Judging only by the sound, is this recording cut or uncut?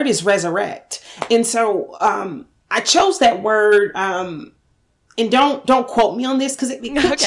uncut